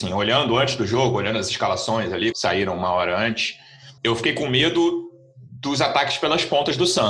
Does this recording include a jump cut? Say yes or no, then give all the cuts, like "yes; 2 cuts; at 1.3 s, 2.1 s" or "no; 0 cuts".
yes; 2 cuts; at 2.3 s, 4.0 s